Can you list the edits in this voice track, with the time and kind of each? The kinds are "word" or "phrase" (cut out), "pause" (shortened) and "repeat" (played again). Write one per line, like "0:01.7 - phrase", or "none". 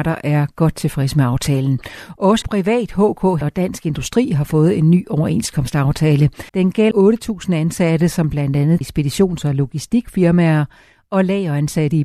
0:02.4 - word
0:03.4 - word
0:06.5 - pause
0:06.9 - word
0:08.8 - phrase